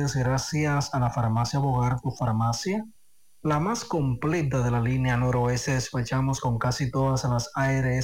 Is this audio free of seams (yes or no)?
yes